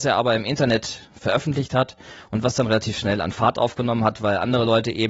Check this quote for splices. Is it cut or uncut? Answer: uncut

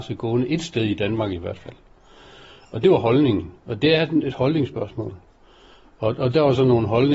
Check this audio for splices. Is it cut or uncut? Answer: uncut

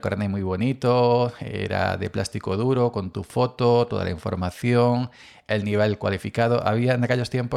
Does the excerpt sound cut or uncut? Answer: uncut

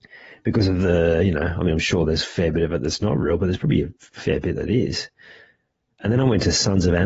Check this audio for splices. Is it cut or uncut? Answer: uncut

